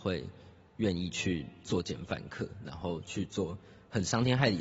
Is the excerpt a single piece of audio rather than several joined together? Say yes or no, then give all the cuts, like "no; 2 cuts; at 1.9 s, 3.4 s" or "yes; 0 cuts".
yes; 0 cuts